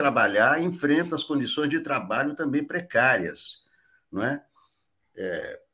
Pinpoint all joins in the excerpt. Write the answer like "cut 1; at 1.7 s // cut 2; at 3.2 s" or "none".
none